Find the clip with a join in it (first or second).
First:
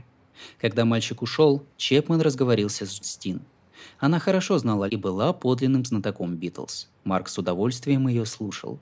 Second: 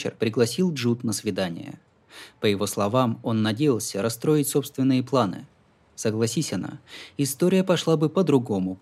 first